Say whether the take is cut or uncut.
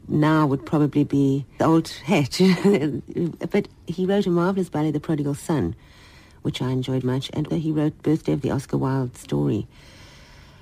cut